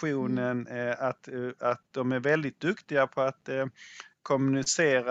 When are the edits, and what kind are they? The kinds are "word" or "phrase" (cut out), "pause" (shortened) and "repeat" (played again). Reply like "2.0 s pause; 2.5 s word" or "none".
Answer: none